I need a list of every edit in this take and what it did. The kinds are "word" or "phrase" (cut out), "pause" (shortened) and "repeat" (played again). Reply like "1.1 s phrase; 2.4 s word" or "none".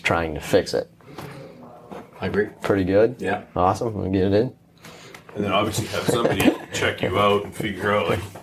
none